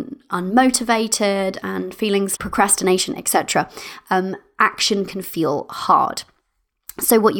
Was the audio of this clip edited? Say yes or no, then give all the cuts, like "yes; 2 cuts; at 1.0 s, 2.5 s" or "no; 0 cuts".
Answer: yes; 1 cut; at 2.4 s